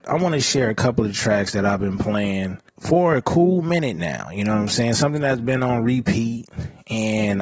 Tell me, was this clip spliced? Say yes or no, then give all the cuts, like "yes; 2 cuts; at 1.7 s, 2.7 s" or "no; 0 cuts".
yes; 1 cut; at 2.7 s